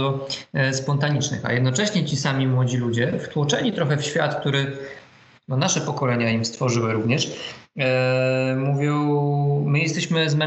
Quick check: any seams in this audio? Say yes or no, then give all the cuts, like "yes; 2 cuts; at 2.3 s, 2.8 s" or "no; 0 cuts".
no; 0 cuts